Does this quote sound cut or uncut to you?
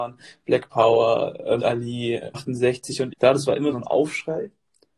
cut